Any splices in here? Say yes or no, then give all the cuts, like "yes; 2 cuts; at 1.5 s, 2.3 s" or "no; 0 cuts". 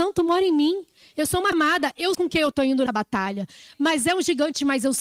yes; 3 cuts; at 1.5 s, 2.1 s, 2.9 s